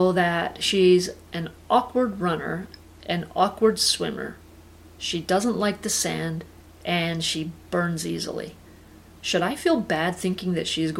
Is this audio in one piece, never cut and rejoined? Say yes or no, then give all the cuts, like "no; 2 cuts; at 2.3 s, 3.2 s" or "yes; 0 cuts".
yes; 0 cuts